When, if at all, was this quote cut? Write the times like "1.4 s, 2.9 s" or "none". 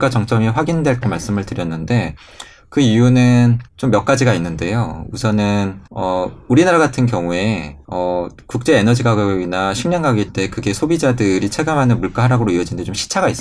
1.0 s, 3.7 s, 5.9 s, 7.8 s, 10.3 s